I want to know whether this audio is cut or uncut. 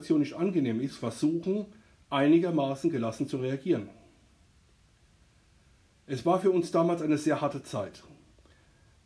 uncut